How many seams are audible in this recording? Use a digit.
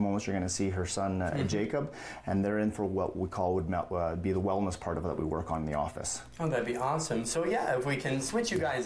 0